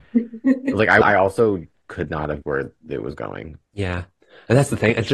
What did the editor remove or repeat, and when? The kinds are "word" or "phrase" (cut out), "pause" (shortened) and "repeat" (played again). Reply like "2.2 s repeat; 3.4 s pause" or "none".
1.0 s word; 2.4 s word; 3.6 s word